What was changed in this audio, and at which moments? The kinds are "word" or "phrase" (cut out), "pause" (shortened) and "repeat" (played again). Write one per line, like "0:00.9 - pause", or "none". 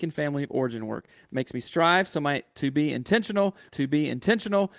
0:03.7 - repeat